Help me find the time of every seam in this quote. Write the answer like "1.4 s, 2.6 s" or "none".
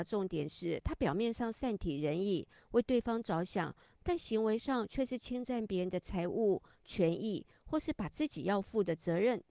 none